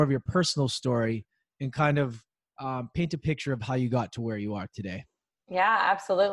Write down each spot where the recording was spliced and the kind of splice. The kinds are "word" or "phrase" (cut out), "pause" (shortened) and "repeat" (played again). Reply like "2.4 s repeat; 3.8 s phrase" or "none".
none